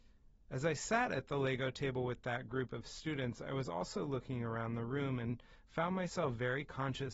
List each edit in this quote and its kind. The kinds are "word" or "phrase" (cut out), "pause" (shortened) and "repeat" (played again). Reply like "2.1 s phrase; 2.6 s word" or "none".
none